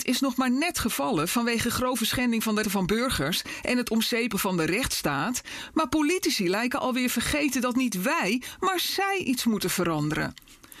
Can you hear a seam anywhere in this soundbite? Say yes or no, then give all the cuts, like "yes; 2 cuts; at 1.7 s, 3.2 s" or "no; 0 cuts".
yes; 2 cuts; at 2.6 s, 4.3 s